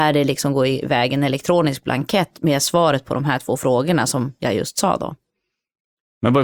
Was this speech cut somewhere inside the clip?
no; 0 cuts

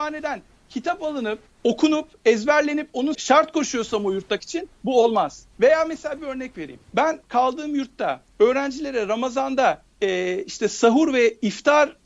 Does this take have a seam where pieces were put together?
yes; 8 cuts; at 1.5 s, 3.1 s, 4.4 s, 5.5 s, 6.2 s, 6.8 s, 8.3 s, 9.9 s

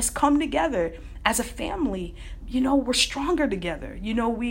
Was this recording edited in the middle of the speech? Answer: yes; 1 cut; at 2.4 s

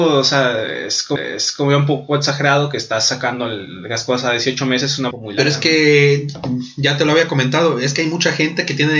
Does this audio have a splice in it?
yes; 2 cuts; at 1.2 s, 5.1 s

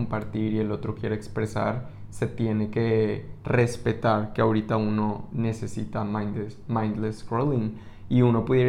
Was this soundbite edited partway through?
no; 0 cuts

